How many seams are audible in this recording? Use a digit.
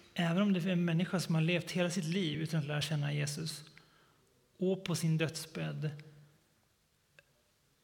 0